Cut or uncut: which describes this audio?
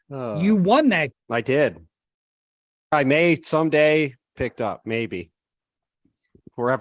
cut